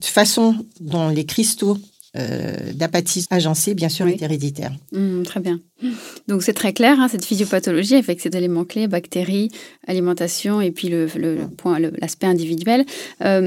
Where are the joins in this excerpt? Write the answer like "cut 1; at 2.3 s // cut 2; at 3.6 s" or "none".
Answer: cut 1; at 3.2 s // cut 2; at 8.3 s